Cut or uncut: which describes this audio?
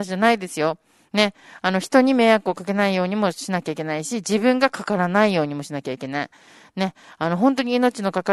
uncut